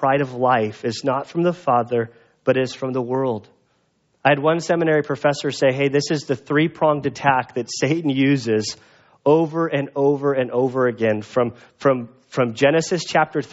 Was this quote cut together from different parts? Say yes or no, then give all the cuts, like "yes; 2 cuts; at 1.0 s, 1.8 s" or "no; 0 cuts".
no; 0 cuts